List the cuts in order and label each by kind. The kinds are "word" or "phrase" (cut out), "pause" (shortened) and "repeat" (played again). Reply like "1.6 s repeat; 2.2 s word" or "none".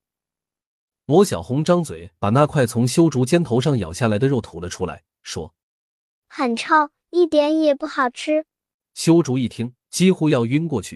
5.6 s pause; 8.7 s pause; 9.8 s pause